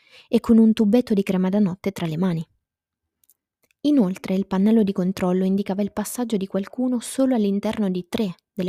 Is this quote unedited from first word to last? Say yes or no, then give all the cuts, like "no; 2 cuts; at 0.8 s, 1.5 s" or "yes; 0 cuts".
yes; 0 cuts